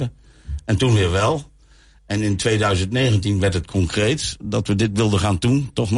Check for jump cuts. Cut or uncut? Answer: uncut